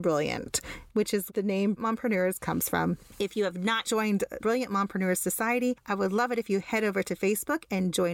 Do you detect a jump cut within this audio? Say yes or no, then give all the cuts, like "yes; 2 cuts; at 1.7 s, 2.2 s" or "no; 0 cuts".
yes; 4 cuts; at 1.3 s, 1.8 s, 3.8 s, 4.4 s